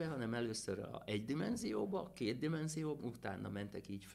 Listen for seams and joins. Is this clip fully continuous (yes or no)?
no